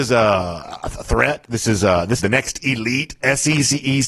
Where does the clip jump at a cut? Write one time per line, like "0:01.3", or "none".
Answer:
0:02.2